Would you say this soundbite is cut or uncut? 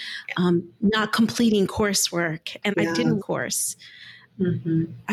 cut